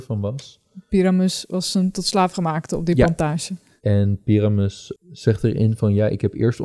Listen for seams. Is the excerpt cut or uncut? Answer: uncut